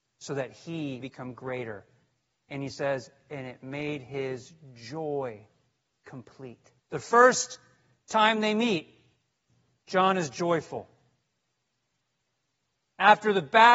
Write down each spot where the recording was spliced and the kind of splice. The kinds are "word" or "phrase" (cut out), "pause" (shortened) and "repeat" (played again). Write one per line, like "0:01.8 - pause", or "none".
0:01.0 - word
0:06.8 - pause